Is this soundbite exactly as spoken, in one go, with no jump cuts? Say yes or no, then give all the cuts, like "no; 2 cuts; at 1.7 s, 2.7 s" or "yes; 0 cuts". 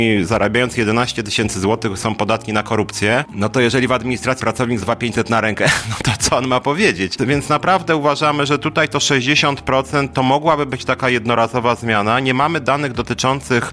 no; 2 cuts; at 4.4 s, 4.8 s